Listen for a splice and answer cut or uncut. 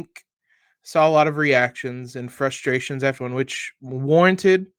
cut